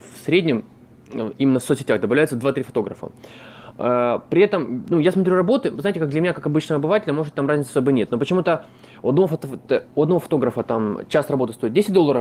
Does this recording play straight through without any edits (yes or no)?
yes